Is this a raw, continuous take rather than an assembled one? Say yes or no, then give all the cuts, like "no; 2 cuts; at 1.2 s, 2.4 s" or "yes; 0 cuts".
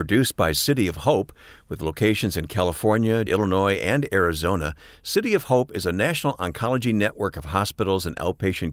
no; 1 cut; at 3.3 s